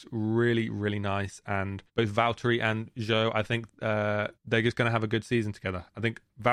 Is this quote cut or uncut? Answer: cut